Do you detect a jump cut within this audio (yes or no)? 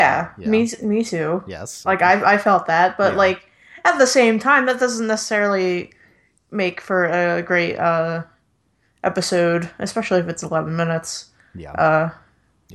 no